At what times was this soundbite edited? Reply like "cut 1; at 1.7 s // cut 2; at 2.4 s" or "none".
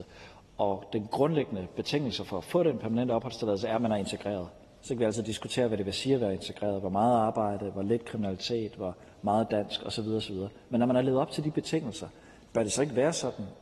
none